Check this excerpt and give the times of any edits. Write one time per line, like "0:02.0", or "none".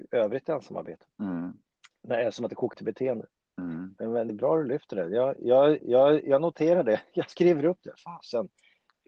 0:01.1
0:02.7
0:03.4
0:04.3
0:05.8
0:07.3